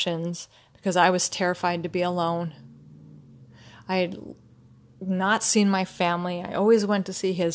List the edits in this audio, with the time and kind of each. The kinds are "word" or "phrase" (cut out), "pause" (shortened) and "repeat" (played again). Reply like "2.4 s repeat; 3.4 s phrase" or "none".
none